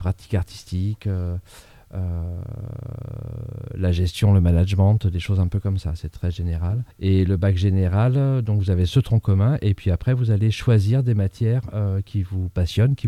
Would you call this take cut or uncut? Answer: cut